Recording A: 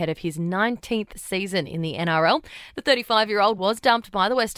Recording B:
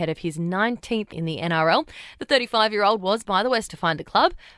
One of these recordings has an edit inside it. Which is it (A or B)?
B